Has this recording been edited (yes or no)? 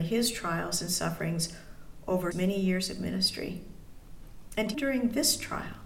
yes